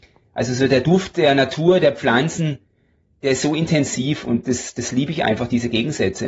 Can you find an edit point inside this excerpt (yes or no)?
no